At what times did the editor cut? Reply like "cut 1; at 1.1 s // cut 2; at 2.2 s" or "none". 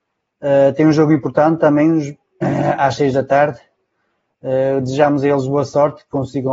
none